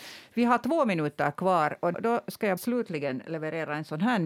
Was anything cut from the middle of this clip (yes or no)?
yes